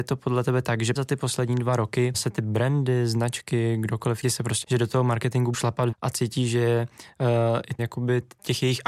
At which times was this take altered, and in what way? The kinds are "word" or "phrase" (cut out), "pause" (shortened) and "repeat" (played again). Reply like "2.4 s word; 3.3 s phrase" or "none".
1.0 s word; 2.1 s word; 4.2 s word; 4.6 s word; 5.5 s word; 5.9 s word; 7.8 s word